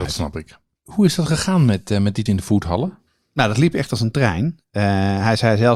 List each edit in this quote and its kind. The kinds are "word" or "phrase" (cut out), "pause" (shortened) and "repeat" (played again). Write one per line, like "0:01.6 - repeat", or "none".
0:02.3 - word